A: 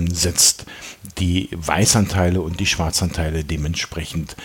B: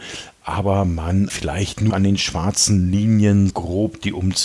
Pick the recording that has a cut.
B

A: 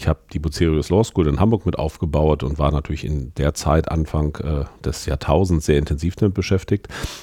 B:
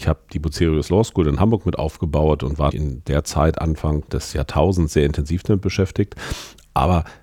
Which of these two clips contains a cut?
B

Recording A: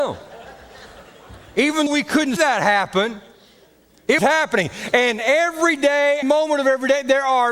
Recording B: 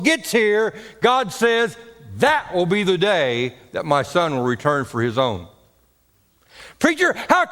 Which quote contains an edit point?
A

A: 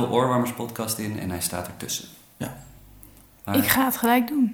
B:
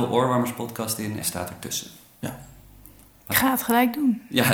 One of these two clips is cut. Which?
B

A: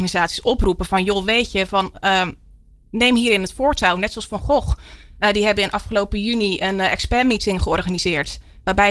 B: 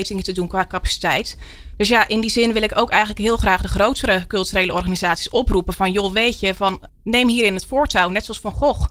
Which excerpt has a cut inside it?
B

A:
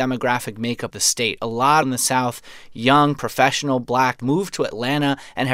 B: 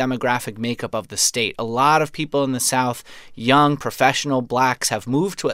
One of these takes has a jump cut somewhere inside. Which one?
A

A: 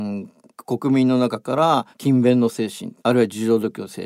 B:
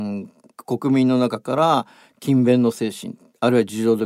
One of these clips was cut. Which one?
A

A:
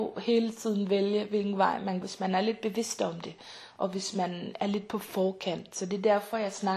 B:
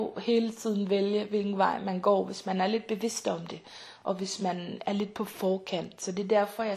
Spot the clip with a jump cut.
A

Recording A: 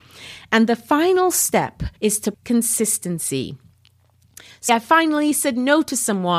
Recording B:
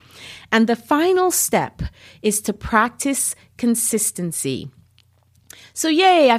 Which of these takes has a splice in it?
A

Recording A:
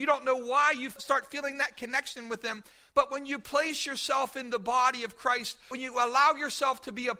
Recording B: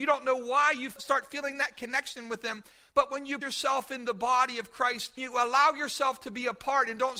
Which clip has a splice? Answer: B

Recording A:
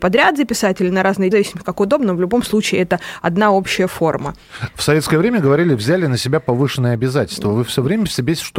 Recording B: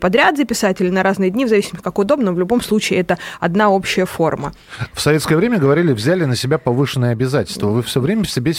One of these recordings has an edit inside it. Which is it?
A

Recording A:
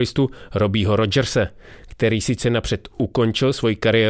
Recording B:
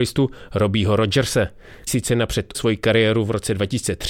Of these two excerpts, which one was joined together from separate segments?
B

